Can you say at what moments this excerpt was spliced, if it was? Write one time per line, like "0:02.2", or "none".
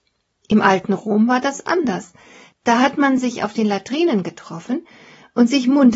none